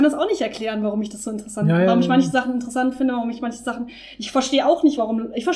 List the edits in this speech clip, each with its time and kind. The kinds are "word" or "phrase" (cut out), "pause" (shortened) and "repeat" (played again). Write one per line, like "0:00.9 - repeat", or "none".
none

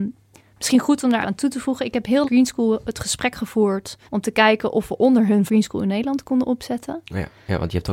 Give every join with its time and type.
0:01.2 - word
0:02.2 - phrase
0:04.1 - pause
0:05.5 - phrase

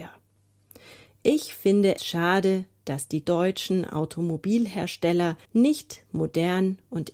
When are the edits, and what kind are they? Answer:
0:02.0 - word
0:03.2 - word
0:05.4 - pause

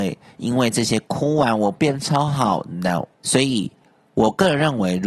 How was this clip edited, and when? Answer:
0:03.1 - pause

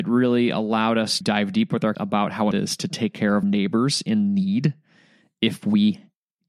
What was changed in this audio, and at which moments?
0:01.2 - word
0:01.9 - word
0:02.5 - word
0:03.4 - word

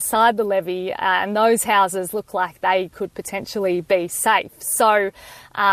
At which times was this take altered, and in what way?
none

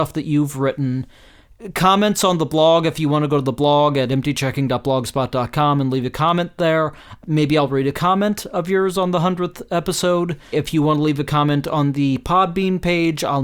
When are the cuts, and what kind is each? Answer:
0:10.5 - word

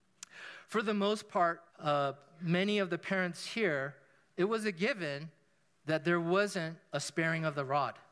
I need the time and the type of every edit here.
0:01.7 - pause

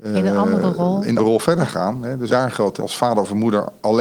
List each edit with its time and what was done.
0:01.2 - word
0:02.3 - word
0:02.8 - word

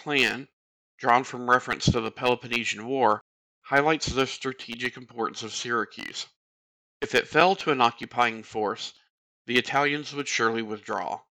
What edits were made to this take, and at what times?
none

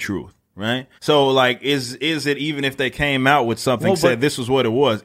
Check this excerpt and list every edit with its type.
0:01.0 - pause

